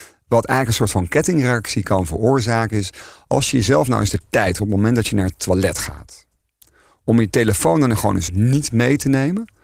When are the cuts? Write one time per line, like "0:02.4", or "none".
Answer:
0:04.6
0:08.3